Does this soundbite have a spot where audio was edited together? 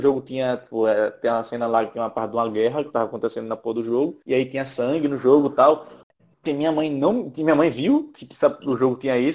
yes; 2 cuts; at 4.2 s, 6.5 s

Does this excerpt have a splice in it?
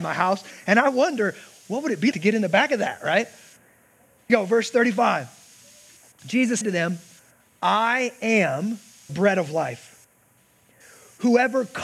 yes; 4 cuts; at 2.1 s, 4.3 s, 6.6 s, 9.1 s

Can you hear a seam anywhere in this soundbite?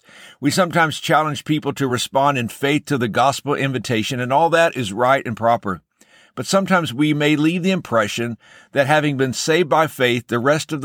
no; 0 cuts

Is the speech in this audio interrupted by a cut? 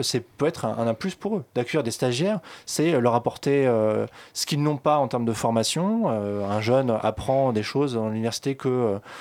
no; 0 cuts

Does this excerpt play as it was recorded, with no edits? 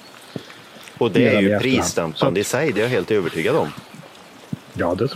yes; 0 cuts

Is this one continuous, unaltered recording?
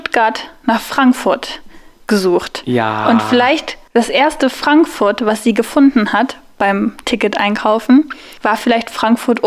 no; 2 cuts; at 3.9 s, 8.4 s

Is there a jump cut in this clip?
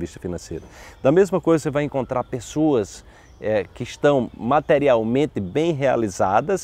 no; 0 cuts

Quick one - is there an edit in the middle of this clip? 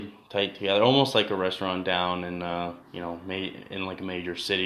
yes; 1 cut; at 2.8 s

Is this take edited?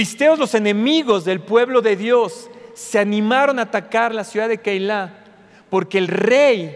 no; 0 cuts

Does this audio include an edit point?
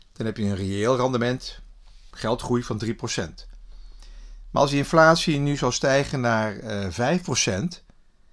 yes; 1 cut; at 2.1 s

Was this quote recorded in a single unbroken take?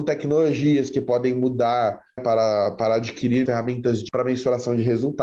no; 3 cuts; at 2.2 s, 3.5 s, 4.1 s

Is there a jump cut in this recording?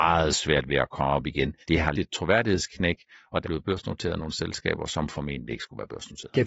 yes; 3 cuts; at 1.6 s, 1.9 s, 3.4 s

